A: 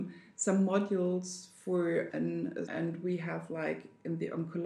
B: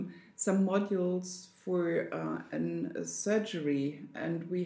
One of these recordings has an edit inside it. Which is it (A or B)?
A